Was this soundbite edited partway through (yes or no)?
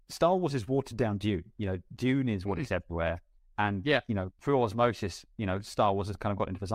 yes